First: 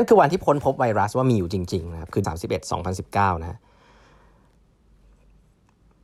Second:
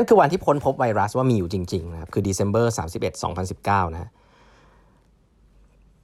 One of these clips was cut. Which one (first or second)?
first